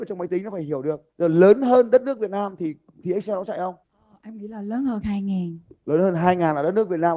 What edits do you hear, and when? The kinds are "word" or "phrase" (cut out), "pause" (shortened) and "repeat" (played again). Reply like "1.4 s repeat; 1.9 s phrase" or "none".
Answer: 1.1 s pause; 3.8 s pause